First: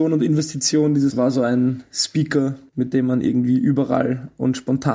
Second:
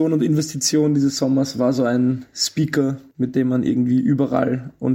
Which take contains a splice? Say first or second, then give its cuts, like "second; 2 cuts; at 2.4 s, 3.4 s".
first; 1 cut; at 1.1 s